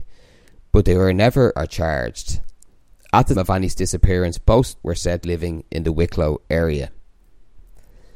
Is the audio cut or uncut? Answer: cut